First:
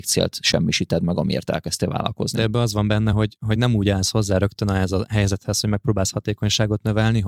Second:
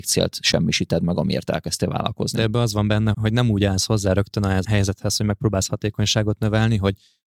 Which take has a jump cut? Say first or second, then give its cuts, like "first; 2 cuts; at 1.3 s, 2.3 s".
second; 2 cuts; at 3.1 s, 4.6 s